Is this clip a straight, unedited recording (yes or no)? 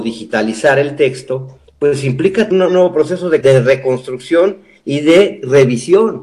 no